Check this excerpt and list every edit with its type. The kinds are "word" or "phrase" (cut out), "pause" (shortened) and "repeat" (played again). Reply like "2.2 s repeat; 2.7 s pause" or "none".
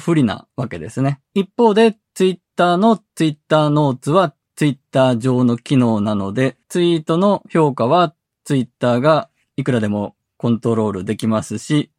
1.2 s pause; 6.6 s pause